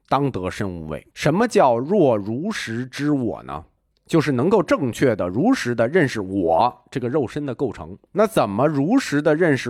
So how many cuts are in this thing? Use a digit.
3